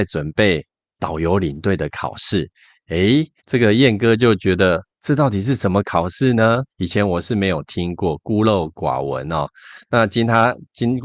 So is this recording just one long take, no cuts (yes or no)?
no